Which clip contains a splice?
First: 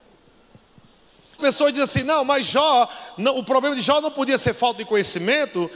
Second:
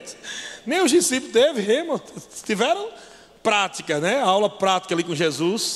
first; 1 cut; at 1.4 s

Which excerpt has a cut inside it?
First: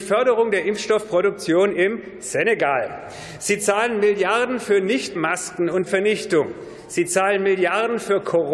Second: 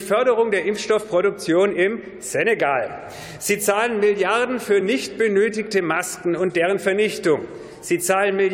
first; 2 cuts; at 5.1 s, 5.9 s

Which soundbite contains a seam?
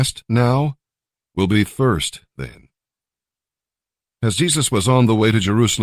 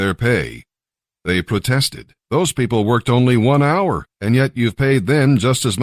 second; 2 cuts; at 2.2 s, 4.1 s

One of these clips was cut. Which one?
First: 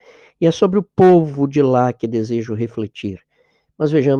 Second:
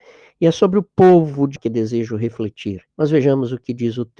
second; 2 cuts; at 1.6 s, 2.9 s

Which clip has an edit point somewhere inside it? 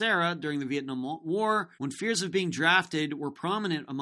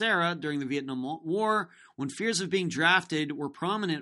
first; 1 cut; at 1.7 s

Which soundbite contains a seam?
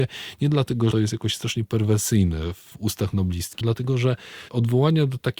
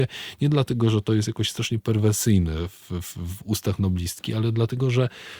first; 4 cuts; at 0.9 s, 2.7 s, 3.6 s, 4.5 s

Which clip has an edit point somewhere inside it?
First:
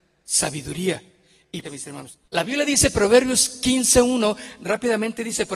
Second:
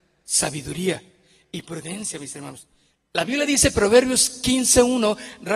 first; 2 cuts; at 1.6 s, 2.3 s

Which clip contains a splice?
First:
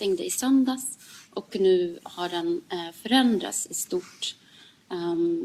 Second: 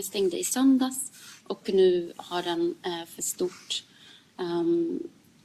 second; 1 cut; at 3.2 s

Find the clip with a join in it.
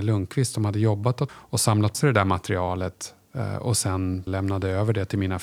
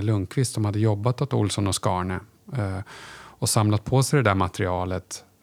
first; 3 cuts; at 1.3 s, 1.9 s, 4.3 s

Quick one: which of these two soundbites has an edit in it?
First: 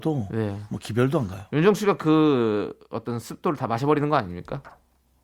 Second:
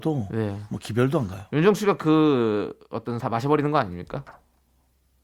second; 1 cut; at 3.2 s

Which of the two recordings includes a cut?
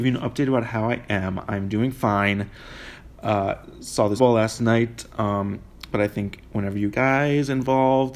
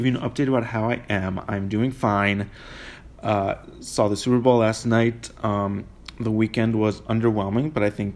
first; 3 cuts; at 4.2 s, 5.9 s, 6.9 s

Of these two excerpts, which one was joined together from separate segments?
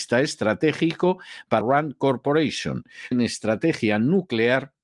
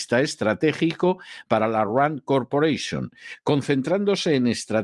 first; 2 cuts; at 1.6 s, 3.1 s

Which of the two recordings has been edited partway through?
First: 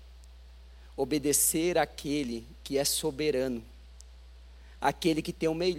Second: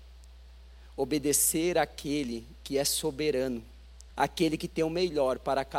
second; 1 cut; at 4.1 s

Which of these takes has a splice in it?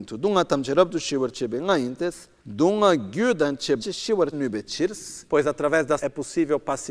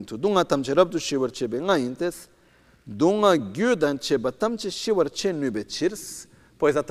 first; 5 cuts; at 2.4 s, 3.8 s, 4.3 s, 5.3 s, 6.0 s

